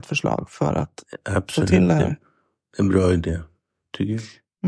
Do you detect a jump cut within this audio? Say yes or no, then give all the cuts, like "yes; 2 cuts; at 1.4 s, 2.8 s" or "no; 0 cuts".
no; 0 cuts